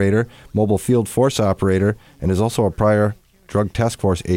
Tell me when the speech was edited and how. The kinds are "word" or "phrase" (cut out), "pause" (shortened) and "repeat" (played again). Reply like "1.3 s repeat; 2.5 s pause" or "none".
none